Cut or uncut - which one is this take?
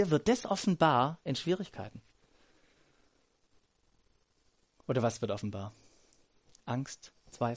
uncut